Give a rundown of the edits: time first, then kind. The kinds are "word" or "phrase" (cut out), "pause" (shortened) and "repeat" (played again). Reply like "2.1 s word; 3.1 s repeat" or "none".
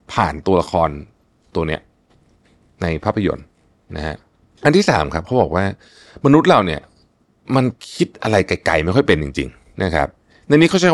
9.7 s word